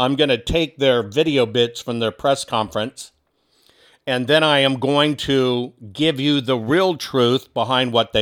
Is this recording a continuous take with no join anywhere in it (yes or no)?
yes